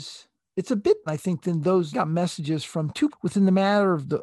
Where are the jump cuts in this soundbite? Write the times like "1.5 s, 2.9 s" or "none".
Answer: 1.1 s, 1.9 s, 3.1 s